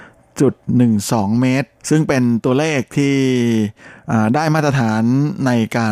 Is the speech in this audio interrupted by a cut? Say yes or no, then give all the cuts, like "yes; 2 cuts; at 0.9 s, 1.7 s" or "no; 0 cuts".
yes; 1 cut; at 1.8 s